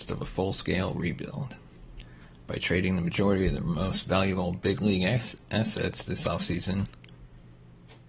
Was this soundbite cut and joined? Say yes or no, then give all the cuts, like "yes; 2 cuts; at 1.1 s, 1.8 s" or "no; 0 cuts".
no; 0 cuts